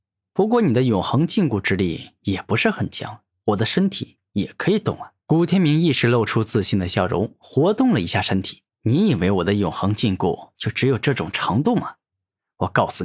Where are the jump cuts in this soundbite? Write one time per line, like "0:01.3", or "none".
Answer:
0:05.2
0:08.7